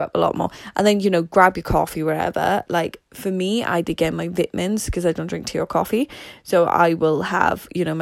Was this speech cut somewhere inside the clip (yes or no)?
no